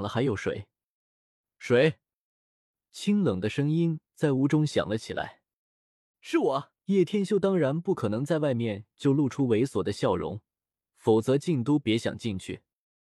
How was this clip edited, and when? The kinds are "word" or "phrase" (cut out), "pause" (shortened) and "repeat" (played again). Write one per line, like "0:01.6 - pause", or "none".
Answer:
0:06.8 - pause